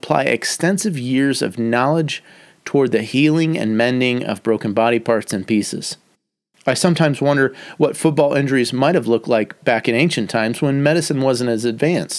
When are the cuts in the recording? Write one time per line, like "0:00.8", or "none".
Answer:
none